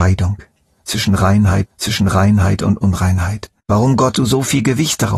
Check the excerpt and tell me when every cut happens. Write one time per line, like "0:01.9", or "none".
0:01.6
0:03.6
0:04.1